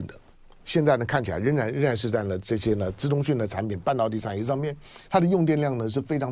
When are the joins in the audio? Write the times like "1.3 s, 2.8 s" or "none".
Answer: none